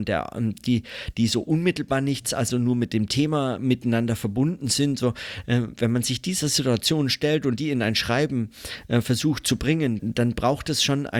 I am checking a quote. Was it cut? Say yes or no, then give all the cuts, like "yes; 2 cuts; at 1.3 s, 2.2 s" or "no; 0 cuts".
yes; 1 cut; at 10.0 s